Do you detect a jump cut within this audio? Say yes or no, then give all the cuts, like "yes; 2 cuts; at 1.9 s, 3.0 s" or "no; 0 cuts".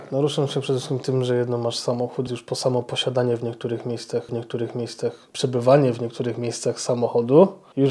yes; 2 cuts; at 2.3 s, 4.3 s